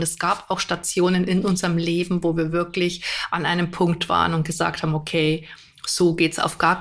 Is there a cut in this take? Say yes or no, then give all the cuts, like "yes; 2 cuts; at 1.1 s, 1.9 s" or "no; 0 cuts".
no; 0 cuts